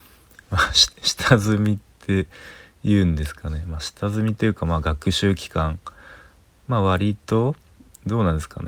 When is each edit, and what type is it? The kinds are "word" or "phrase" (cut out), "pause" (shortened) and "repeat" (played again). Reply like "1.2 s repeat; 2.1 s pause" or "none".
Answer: none